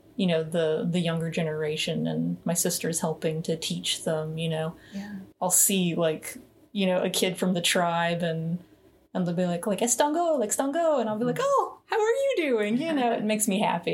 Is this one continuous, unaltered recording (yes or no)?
yes